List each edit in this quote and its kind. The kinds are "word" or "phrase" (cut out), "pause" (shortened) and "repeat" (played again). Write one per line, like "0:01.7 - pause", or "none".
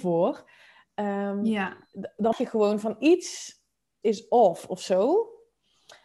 0:02.3 - word
0:04.0 - word